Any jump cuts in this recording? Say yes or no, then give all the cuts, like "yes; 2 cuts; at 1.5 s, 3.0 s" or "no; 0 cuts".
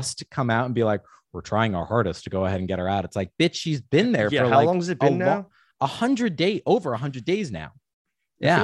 no; 0 cuts